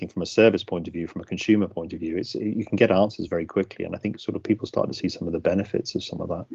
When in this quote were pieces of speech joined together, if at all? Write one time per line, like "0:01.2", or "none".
none